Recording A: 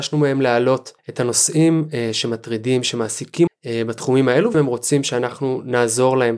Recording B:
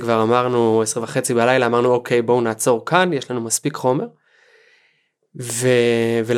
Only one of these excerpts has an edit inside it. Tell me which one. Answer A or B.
A